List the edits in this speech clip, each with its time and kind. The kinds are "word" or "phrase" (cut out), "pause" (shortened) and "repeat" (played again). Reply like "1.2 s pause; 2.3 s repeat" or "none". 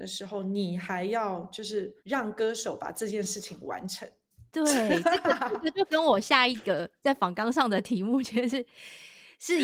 2.0 s pause; 4.5 s pause